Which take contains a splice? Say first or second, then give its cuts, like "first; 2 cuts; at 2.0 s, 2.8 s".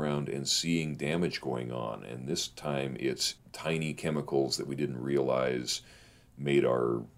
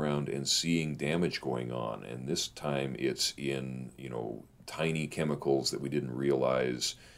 first; 1 cut; at 3.4 s